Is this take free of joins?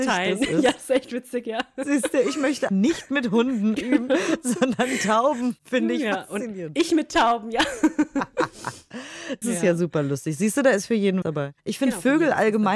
no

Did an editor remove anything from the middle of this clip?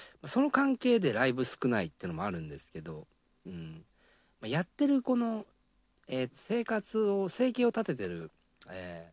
yes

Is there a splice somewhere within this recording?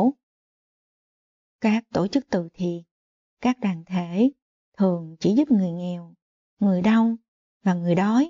no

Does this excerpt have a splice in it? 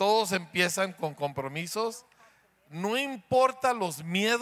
no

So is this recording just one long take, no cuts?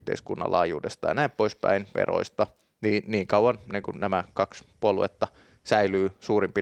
yes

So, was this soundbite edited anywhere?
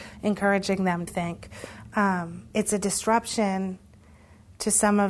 yes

